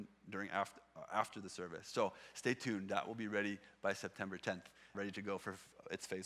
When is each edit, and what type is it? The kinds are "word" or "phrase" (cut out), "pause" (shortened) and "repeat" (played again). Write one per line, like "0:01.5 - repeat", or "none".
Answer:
0:04.9 - word